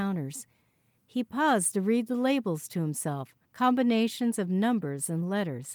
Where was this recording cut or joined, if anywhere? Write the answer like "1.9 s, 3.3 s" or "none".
none